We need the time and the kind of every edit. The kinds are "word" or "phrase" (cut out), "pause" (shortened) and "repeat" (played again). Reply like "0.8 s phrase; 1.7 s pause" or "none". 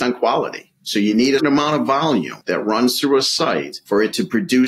1.4 s word